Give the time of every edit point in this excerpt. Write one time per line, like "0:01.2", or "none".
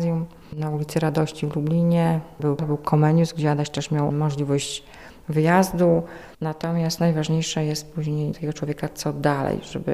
0:02.6
0:04.1
0:08.3

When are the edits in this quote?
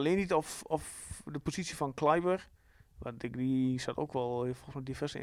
none

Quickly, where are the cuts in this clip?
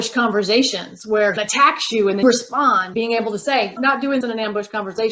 0:01.4
0:02.2
0:02.9
0:03.8
0:04.2

